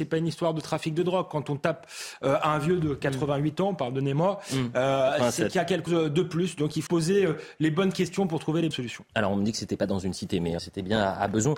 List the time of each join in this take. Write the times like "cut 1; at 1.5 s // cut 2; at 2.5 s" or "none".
cut 1; at 5.9 s // cut 2; at 6.9 s // cut 3; at 8.7 s // cut 4; at 10.6 s